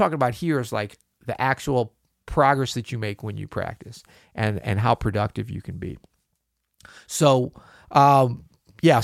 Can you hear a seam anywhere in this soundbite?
no; 0 cuts

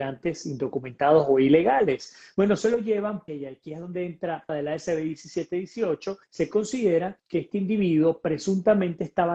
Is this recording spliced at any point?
yes; 4 cuts; at 3.3 s, 4.5 s, 6.2 s, 7.2 s

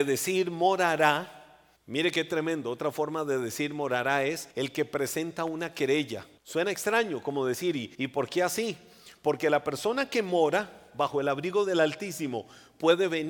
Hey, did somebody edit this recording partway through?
yes; 4 cuts; at 1.8 s, 4.5 s, 6.4 s, 7.9 s

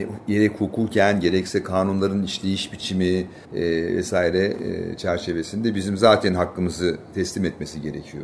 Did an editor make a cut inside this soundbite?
yes; 1 cut; at 3.4 s

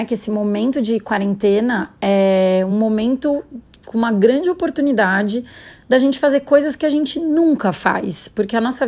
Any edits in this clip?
no; 0 cuts

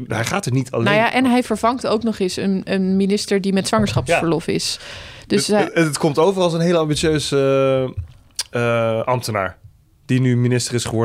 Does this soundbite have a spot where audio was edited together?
no; 0 cuts

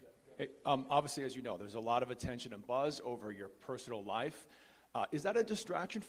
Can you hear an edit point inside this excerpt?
no; 0 cuts

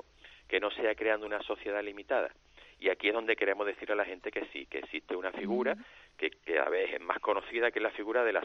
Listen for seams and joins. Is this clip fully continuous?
yes; 0 cuts

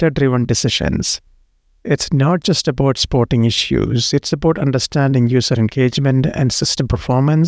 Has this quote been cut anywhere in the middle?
no; 0 cuts

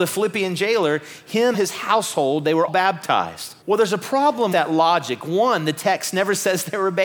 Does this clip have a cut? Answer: yes; 4 cuts; at 1.5 s, 2.7 s, 3.6 s, 4.5 s

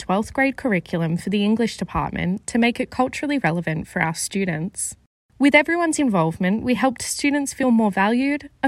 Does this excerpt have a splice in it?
no; 0 cuts

